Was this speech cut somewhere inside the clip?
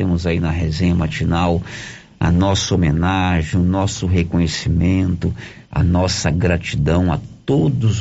yes; 1 cut; at 5.6 s

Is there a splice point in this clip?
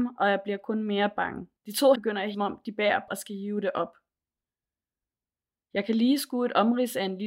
yes; 4 cuts; at 1.6 s, 1.9 s, 2.3 s, 3.1 s

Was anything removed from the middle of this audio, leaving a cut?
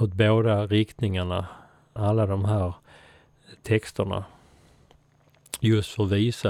yes; 1 cut; at 2.0 s

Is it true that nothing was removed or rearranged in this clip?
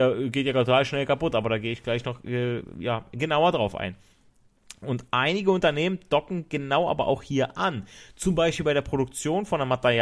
yes; 0 cuts

